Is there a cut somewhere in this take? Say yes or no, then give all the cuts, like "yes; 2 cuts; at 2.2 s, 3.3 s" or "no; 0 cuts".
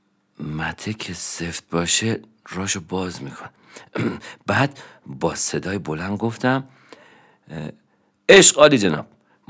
no; 0 cuts